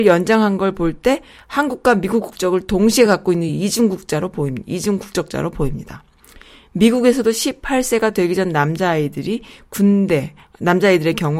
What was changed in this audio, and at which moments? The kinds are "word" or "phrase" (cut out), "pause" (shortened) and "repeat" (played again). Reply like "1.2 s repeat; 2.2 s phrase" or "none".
none